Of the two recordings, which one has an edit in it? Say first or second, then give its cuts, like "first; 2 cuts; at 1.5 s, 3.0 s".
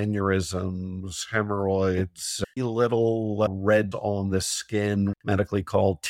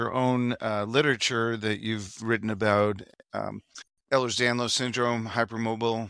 first; 3 cuts; at 2.6 s, 3.9 s, 5.1 s